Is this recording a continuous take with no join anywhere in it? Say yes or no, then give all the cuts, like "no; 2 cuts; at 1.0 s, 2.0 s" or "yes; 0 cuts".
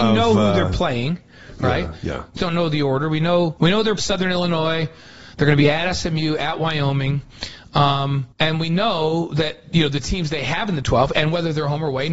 no; 5 cuts; at 2.4 s, 3.6 s, 4.0 s, 8.3 s, 10.8 s